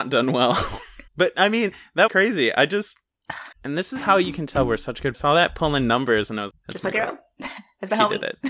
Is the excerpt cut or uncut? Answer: cut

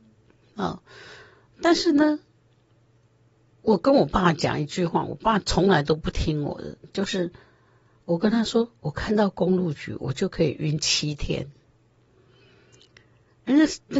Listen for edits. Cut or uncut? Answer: uncut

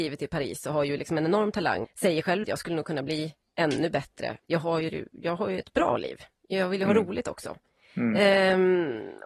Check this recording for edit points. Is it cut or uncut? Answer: cut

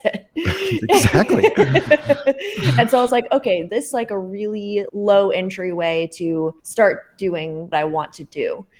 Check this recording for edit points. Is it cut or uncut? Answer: cut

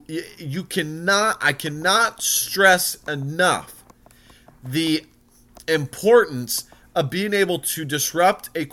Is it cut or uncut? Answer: uncut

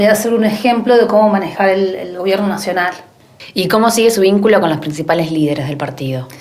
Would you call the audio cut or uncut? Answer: uncut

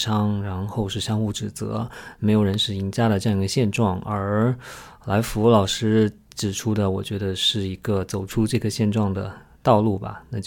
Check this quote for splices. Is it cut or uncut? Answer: uncut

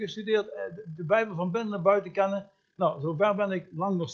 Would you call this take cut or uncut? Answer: uncut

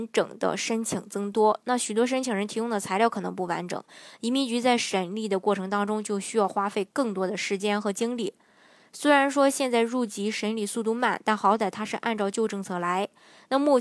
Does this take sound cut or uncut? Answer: uncut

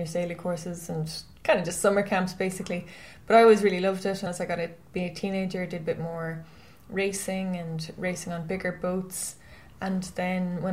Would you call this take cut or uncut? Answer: cut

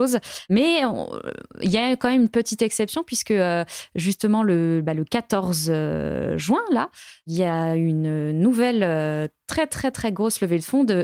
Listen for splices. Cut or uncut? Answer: uncut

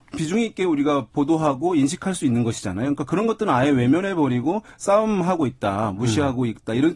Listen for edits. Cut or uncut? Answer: uncut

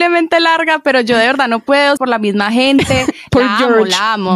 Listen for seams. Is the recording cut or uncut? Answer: cut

